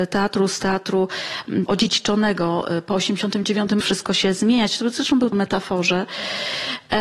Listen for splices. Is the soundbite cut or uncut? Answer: cut